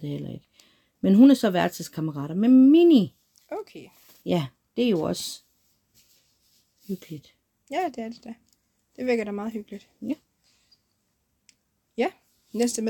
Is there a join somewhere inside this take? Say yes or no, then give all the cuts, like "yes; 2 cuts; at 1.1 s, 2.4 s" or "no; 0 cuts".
no; 0 cuts